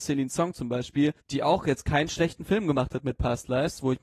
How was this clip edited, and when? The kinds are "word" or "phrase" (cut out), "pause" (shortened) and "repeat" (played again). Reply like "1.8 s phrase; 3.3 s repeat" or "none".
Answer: 1.2 s pause